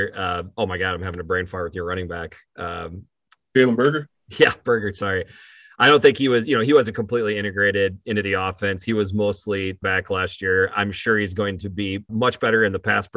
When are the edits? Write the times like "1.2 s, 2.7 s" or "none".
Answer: 9.8 s, 12.1 s